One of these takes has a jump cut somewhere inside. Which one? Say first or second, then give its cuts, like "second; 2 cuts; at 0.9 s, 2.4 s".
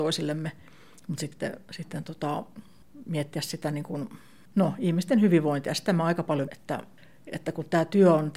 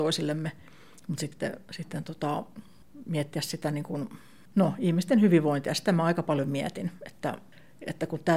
first; 1 cut; at 6.4 s